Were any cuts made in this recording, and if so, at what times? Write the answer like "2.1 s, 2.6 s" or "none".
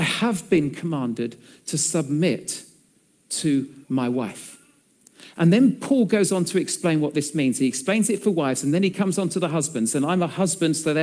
3.8 s